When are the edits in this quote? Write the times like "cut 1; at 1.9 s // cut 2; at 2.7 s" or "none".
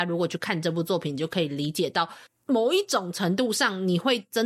cut 1; at 2.3 s